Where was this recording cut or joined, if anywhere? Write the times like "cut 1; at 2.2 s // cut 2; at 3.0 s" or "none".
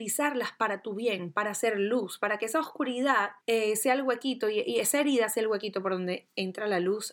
cut 1; at 3.4 s